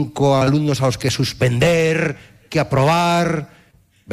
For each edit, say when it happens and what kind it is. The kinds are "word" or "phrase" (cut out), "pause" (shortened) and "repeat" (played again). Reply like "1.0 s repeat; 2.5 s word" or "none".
none